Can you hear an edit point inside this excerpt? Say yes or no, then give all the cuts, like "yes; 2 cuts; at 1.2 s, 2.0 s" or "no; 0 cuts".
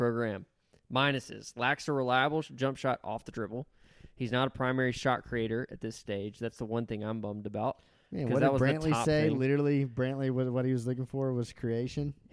no; 0 cuts